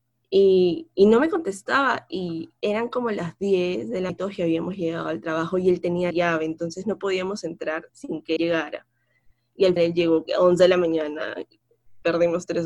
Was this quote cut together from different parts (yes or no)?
yes